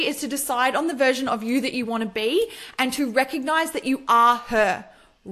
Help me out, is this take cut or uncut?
uncut